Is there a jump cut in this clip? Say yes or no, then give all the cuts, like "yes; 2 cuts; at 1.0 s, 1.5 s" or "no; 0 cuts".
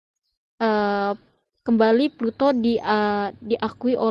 no; 0 cuts